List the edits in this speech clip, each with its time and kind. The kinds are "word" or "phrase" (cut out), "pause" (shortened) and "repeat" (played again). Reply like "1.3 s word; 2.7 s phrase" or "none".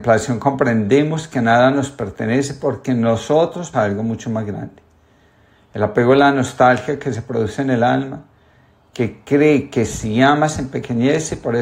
3.7 s word

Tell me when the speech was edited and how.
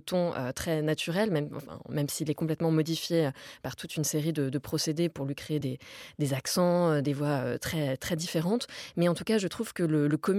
none

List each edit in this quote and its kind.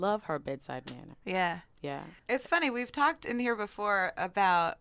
2.2 s pause

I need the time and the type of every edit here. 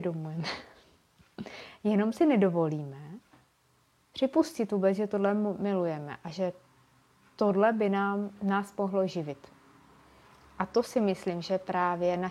none

